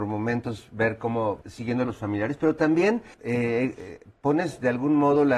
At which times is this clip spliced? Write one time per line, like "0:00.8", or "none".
0:01.4
0:01.8
0:03.1